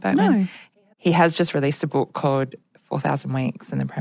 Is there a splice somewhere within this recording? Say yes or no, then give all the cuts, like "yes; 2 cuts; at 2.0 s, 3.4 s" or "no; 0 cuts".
no; 0 cuts